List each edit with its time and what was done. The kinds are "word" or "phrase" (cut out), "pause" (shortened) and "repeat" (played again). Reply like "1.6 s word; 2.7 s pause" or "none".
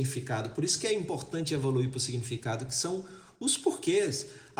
none